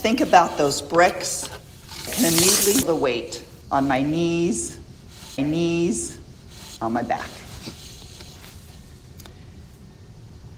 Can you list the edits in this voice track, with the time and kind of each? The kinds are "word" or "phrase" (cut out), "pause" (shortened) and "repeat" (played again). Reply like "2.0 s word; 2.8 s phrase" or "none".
2.1 s word; 2.8 s word; 3.6 s pause; 5.4 s repeat